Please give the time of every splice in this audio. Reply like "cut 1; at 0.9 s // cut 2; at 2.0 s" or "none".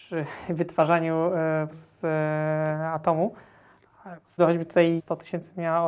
cut 1; at 1.7 s // cut 2; at 4.4 s // cut 3; at 5.0 s